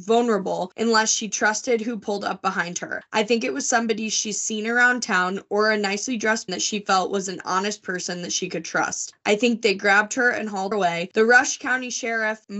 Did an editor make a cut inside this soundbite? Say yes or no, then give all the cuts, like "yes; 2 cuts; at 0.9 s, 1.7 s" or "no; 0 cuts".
yes; 2 cuts; at 6.5 s, 10.7 s